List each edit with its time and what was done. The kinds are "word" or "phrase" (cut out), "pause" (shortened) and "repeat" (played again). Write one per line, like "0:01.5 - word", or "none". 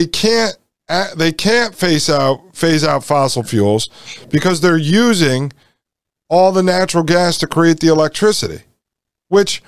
none